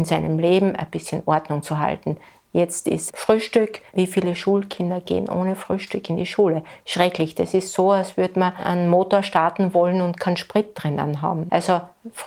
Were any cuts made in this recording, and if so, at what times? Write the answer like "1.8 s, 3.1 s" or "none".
3.1 s